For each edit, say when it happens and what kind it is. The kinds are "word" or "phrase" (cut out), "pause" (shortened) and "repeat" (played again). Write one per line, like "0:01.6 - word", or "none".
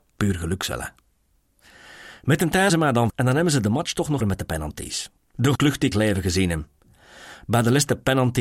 0:02.7 - word
0:03.1 - word
0:04.2 - word
0:05.6 - word
0:05.9 - word